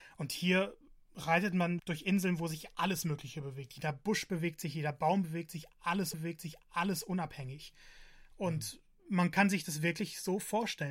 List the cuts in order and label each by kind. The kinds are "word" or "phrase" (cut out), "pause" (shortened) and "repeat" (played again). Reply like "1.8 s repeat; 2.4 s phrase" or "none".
1.8 s word; 6.1 s repeat